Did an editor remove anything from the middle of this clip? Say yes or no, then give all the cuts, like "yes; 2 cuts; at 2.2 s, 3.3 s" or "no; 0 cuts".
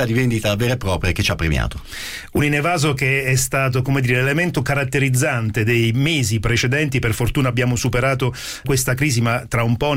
no; 0 cuts